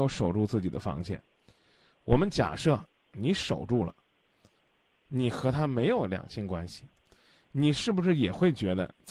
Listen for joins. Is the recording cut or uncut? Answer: uncut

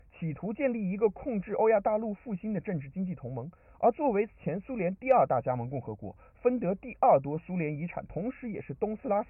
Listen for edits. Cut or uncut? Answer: uncut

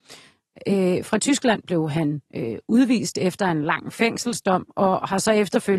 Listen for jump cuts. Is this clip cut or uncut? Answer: cut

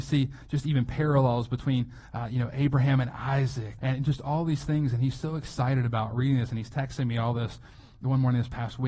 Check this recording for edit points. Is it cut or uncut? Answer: cut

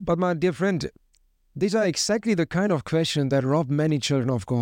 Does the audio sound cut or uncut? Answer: uncut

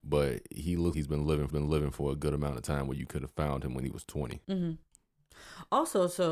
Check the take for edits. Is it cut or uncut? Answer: cut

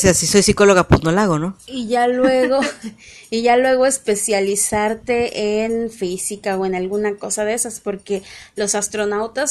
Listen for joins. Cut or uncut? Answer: uncut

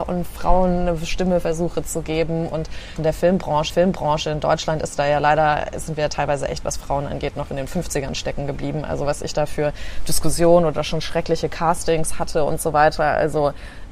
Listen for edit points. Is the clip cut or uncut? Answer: cut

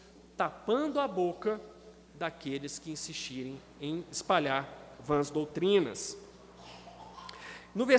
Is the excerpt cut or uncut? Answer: uncut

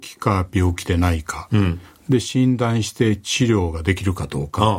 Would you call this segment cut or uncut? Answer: uncut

